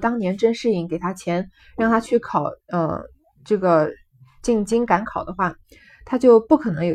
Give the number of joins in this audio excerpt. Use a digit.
0